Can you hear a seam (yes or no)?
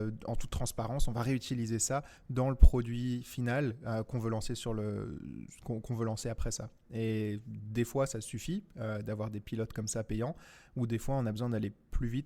no